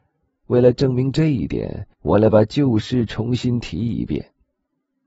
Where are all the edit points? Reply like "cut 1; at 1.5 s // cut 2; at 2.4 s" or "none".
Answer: cut 1; at 1.9 s

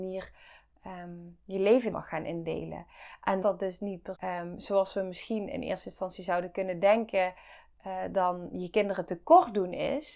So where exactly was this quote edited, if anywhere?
cut 1; at 1.9 s // cut 2; at 3.4 s // cut 3; at 4.1 s

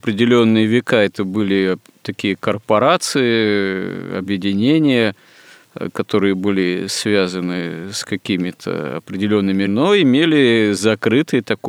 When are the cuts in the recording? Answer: cut 1; at 9.7 s

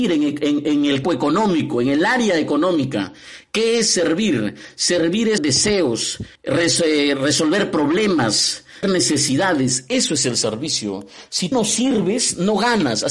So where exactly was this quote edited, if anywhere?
cut 1; at 1.0 s // cut 2; at 5.4 s // cut 3; at 6.4 s // cut 4; at 8.8 s // cut 5; at 11.5 s

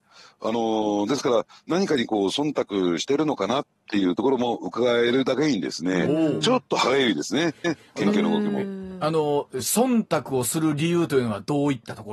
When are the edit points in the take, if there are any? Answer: cut 1; at 7.6 s

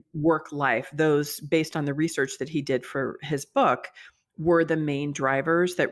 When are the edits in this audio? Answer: none

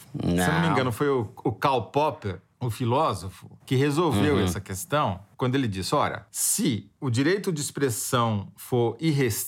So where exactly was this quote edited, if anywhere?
none

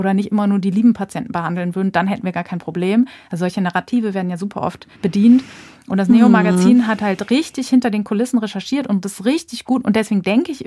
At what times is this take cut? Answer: cut 1; at 4.9 s

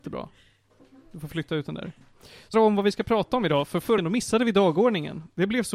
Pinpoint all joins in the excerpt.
cut 1; at 2.5 s // cut 2; at 4.0 s

